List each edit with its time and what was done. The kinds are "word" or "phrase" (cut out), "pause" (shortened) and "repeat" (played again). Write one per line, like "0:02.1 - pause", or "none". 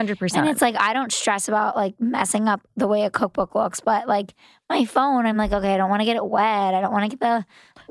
none